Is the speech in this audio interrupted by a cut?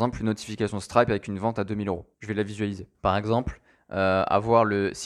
yes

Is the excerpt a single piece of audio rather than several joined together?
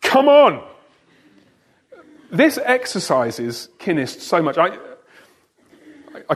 yes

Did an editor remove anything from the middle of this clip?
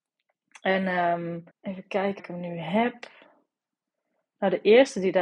yes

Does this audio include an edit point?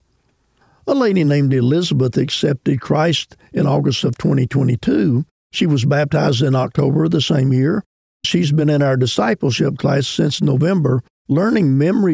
no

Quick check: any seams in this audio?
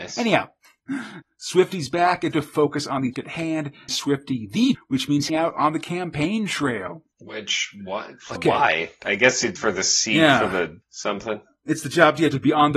yes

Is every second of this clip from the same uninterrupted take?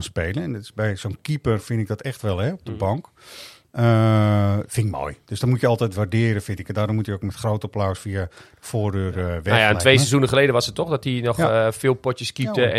yes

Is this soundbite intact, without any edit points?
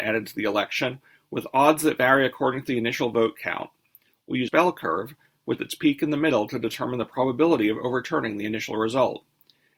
no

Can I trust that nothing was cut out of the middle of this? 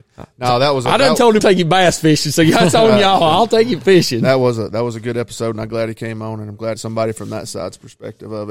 no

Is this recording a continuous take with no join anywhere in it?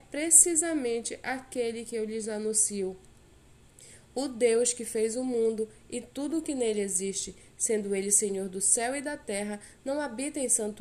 yes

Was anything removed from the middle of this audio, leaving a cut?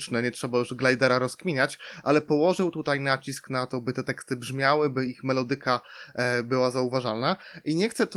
no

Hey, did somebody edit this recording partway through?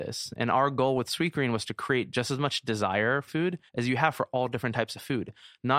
yes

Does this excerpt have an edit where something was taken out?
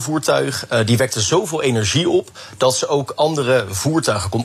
no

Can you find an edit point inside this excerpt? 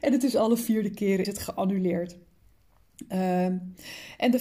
yes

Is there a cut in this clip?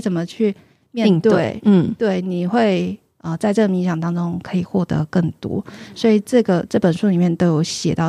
no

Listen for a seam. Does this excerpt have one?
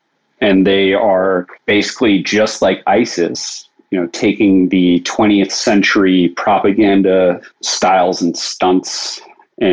yes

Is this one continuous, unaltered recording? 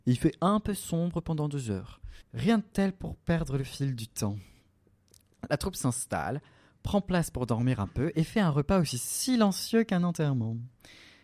no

